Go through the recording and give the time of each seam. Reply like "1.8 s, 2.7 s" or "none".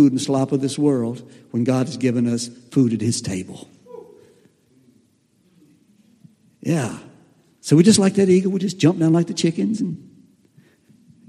none